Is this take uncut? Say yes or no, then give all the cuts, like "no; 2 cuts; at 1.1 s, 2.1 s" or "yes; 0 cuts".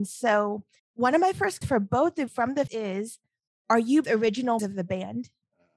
no; 5 cuts; at 1.6 s, 2.3 s, 2.7 s, 4.0 s, 4.6 s